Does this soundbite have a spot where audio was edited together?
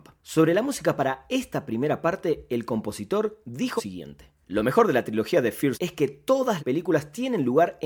yes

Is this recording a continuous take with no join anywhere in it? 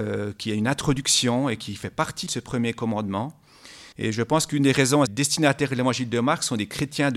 no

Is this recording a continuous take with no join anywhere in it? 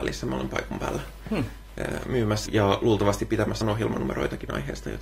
no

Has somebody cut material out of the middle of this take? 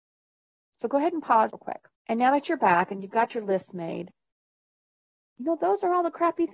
yes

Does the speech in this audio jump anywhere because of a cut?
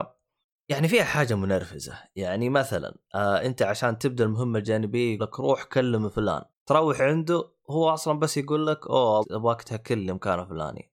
yes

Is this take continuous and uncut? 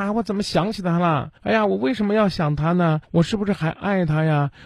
no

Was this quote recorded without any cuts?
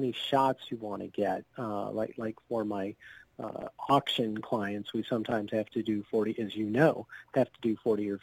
yes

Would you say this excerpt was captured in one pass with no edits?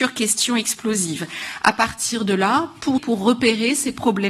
no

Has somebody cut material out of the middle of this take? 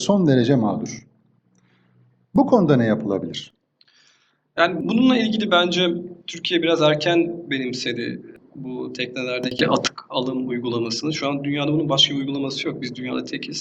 no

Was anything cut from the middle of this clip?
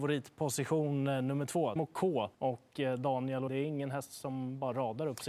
yes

